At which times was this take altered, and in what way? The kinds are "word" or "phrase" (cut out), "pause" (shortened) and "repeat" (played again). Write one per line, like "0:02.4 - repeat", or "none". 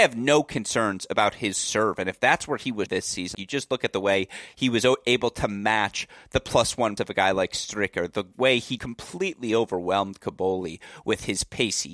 0:02.9 - word
0:03.3 - word
0:07.0 - word
0:08.8 - word